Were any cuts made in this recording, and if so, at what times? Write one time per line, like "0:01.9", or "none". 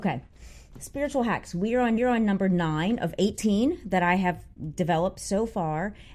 0:02.0